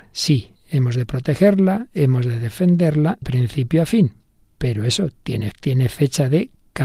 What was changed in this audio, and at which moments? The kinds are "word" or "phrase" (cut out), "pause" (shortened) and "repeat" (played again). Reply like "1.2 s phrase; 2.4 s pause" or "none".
3.2 s word; 5.5 s word